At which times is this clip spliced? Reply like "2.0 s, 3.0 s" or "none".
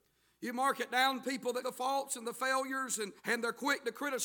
1.6 s, 3.2 s